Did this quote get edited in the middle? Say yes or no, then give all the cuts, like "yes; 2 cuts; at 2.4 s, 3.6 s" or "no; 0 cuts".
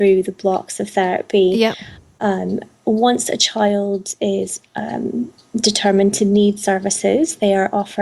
no; 0 cuts